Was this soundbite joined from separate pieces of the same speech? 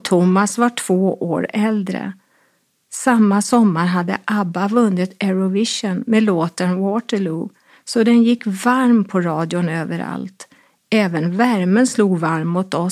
no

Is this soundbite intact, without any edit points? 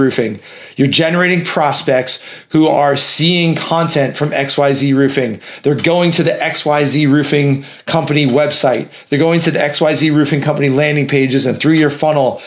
yes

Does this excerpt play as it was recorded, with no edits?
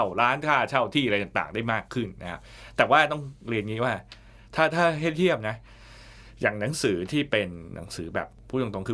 yes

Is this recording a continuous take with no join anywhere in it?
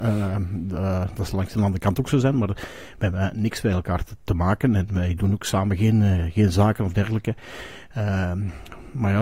yes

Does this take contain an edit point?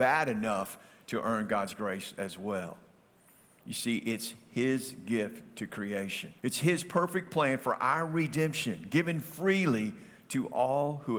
yes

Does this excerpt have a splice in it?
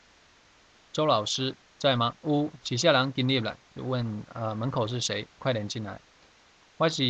yes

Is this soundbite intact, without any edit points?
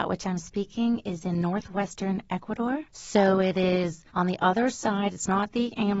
no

